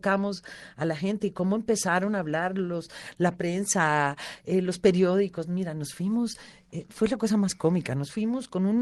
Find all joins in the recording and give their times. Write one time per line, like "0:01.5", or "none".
none